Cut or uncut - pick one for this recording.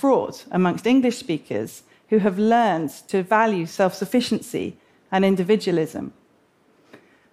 uncut